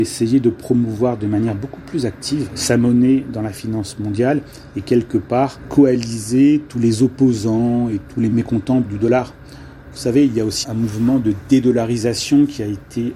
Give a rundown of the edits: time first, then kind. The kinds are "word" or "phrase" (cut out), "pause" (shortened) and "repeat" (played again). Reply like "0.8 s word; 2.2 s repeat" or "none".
8.8 s word; 10.6 s word